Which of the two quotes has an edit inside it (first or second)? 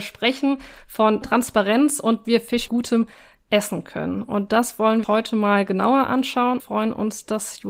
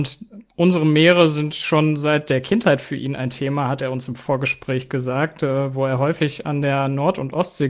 first